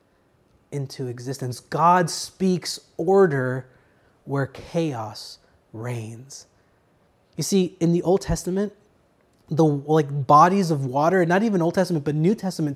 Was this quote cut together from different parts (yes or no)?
no